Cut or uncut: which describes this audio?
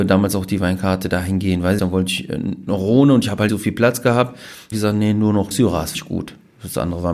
cut